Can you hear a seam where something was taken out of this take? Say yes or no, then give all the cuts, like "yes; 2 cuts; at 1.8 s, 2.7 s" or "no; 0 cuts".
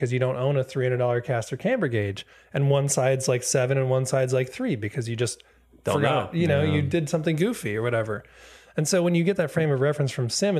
no; 0 cuts